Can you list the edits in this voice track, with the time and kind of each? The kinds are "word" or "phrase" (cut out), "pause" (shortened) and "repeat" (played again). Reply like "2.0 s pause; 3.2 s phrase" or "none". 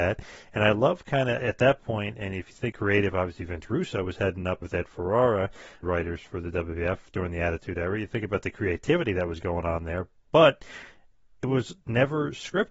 1.4 s word; 2.7 s word; 4.6 s word; 5.8 s word